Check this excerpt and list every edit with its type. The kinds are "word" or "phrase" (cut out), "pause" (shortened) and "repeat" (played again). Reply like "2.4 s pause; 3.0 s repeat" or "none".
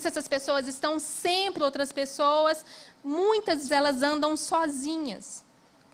1.6 s word; 3.7 s word